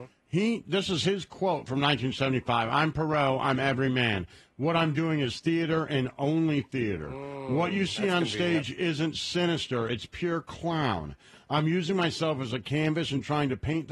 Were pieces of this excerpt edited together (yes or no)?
no